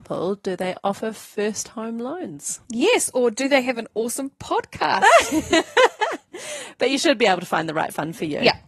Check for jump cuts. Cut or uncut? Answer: cut